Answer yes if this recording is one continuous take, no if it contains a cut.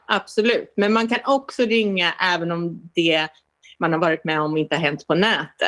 yes